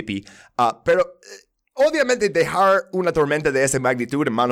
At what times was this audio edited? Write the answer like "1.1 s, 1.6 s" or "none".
none